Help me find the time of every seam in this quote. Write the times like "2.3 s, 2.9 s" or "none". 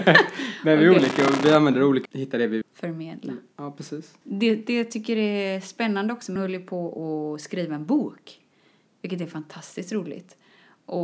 2.1 s, 2.6 s, 4.2 s, 6.4 s